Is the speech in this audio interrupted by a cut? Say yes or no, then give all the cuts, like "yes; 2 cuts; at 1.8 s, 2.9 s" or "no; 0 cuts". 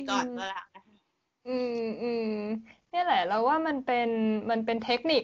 no; 0 cuts